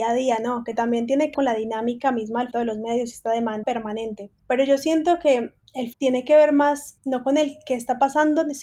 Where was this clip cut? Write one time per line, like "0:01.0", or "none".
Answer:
0:01.3
0:02.5
0:03.6
0:05.9